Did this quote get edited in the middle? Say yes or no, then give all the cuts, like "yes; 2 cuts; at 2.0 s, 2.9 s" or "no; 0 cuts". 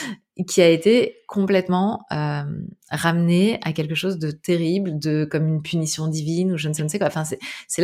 yes; 1 cut; at 6.8 s